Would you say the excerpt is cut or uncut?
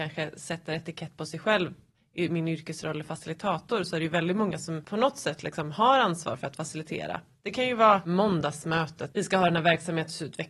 cut